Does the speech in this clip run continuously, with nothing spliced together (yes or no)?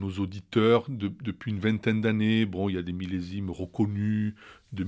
yes